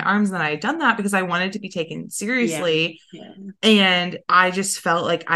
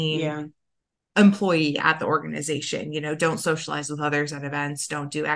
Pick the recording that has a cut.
first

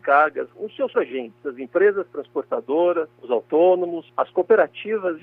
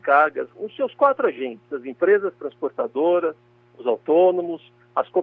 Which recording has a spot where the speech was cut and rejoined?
first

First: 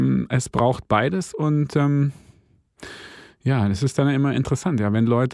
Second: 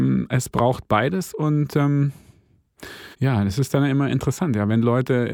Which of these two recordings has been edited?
second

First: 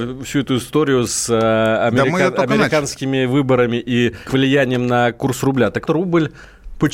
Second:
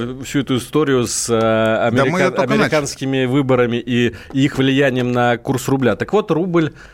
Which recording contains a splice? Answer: first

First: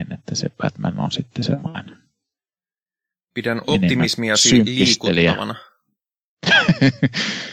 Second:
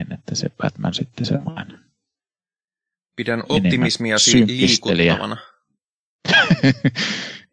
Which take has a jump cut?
second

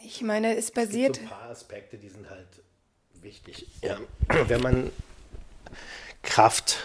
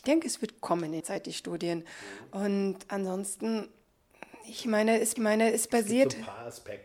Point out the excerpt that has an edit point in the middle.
second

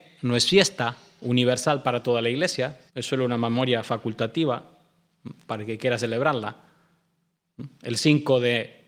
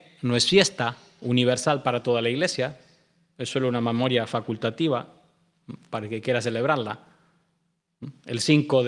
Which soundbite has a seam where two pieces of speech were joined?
first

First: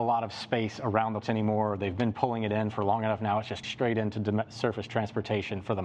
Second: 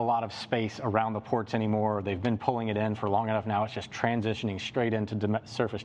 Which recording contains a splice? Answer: first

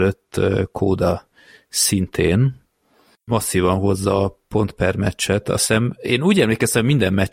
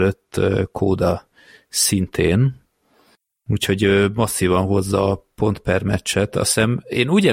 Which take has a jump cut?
first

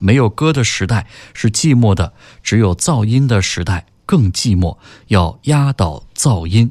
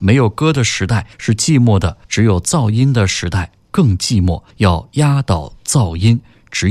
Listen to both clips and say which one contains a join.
second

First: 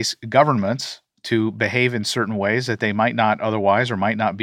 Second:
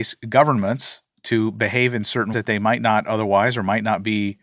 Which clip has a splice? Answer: second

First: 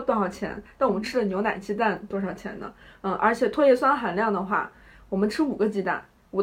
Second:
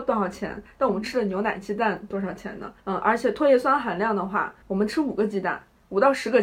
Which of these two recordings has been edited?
second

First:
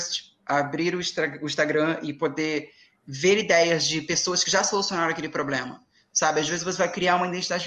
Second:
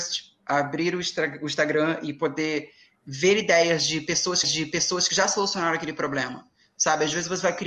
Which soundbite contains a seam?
second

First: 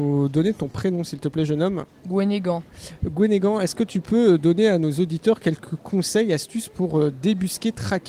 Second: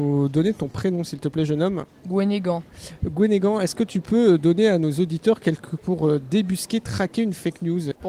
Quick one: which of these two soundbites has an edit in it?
second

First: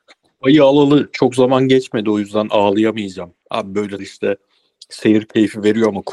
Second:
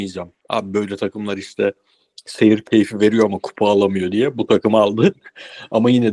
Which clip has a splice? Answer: first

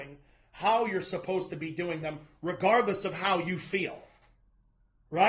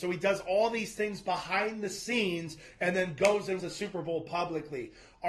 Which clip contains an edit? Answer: second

